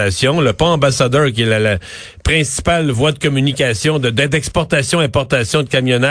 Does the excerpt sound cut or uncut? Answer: uncut